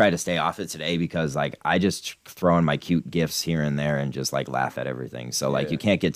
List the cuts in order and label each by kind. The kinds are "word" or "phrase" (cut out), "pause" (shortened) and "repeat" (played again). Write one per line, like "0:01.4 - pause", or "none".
none